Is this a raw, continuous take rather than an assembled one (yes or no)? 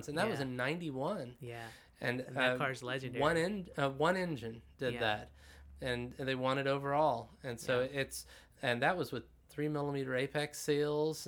yes